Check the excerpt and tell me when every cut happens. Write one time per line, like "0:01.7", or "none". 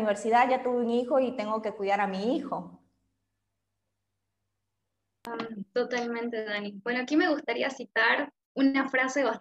0:08.4